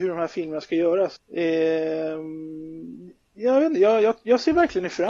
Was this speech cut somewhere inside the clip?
yes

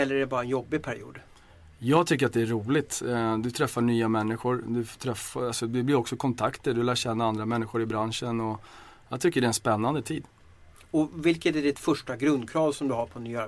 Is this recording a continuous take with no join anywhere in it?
yes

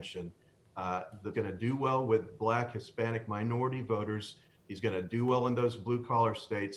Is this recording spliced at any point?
yes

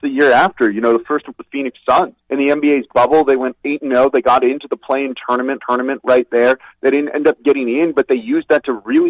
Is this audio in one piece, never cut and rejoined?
no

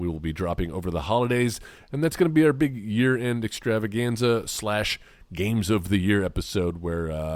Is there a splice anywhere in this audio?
no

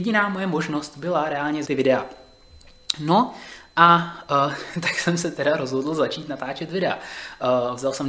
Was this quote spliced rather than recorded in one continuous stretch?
yes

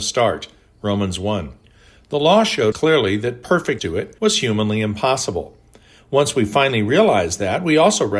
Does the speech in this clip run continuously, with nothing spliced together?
no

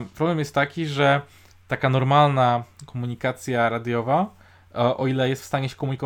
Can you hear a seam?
no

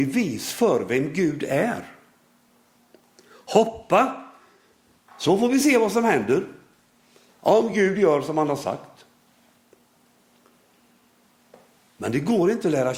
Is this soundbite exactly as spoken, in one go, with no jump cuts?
yes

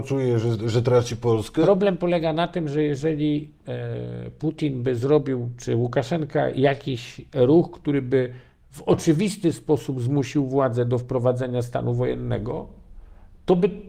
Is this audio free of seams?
yes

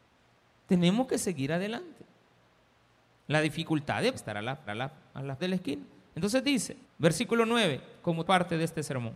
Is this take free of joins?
no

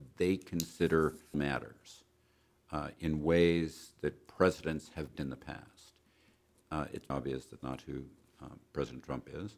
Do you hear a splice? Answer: yes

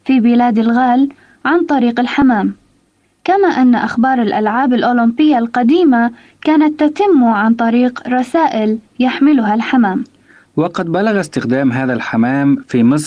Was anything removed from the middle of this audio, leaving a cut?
no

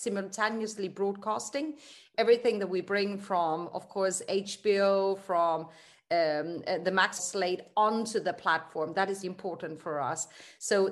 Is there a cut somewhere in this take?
yes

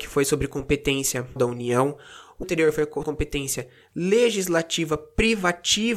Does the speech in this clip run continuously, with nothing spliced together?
no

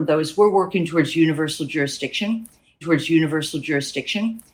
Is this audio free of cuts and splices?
no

